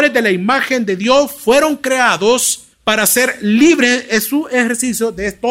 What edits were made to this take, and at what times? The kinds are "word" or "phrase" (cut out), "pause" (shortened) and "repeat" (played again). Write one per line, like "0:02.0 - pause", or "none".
0:02.7 - pause